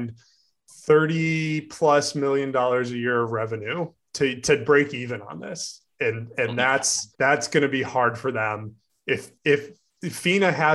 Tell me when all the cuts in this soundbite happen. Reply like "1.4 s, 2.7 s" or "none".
7.1 s